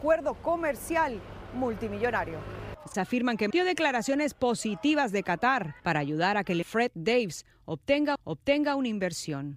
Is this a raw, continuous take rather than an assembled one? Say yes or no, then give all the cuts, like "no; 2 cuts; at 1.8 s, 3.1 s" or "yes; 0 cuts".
no; 5 cuts; at 2.9 s, 3.5 s, 5.8 s, 6.6 s, 8.2 s